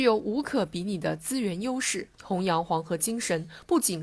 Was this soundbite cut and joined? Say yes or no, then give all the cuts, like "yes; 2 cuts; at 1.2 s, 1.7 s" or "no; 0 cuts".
yes; 1 cut; at 2.1 s